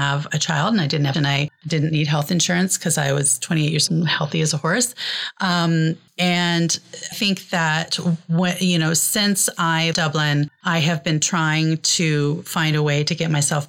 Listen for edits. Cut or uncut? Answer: cut